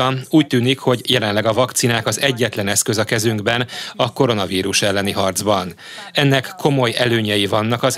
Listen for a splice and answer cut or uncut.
uncut